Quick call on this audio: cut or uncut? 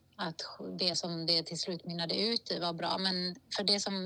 uncut